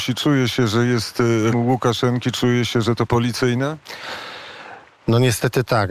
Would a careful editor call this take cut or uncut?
cut